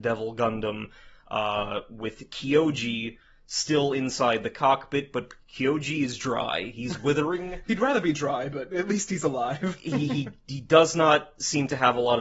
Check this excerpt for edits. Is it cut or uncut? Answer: uncut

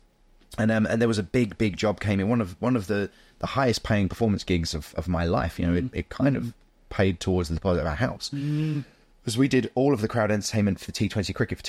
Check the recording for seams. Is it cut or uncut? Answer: uncut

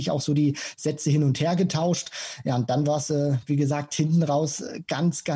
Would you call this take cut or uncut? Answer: uncut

